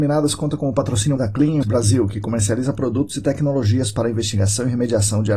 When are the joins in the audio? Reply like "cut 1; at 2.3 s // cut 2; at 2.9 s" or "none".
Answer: cut 1; at 1.2 s // cut 2; at 1.6 s